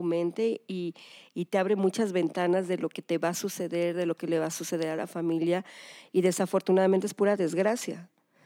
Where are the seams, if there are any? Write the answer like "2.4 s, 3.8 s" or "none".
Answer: none